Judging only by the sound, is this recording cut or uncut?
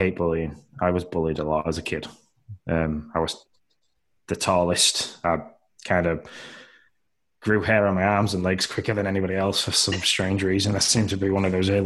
uncut